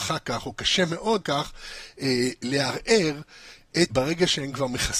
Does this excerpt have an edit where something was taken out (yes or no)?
yes